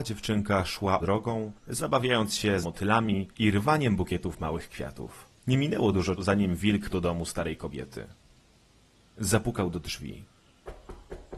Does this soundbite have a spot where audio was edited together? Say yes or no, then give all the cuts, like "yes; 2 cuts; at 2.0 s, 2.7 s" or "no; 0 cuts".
yes; 7 cuts; at 1.0 s, 1.6 s, 2.6 s, 3.3 s, 5.4 s, 6.2 s, 6.9 s